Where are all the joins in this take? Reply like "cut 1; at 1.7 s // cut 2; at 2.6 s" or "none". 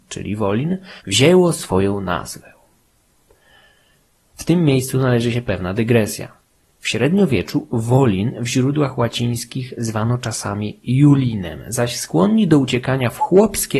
cut 1; at 1.0 s